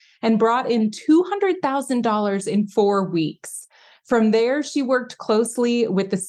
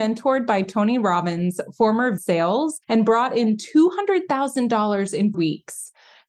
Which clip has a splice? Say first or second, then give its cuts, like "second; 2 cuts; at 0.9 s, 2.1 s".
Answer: second; 3 cuts; at 2.2 s, 2.8 s, 5.3 s